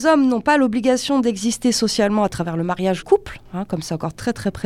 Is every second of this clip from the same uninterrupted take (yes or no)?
no